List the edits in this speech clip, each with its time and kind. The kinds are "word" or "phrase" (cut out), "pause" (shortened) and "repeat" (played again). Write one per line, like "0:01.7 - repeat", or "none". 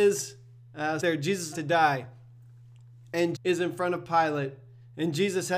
0:01.0 - phrase
0:01.5 - word
0:03.3 - word